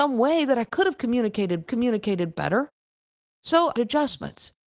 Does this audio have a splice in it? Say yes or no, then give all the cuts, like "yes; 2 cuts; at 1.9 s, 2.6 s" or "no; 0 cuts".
yes; 2 cuts; at 1.7 s, 3.8 s